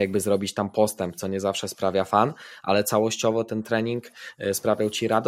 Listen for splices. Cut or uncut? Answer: uncut